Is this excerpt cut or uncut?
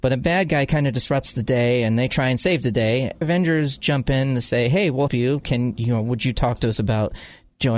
cut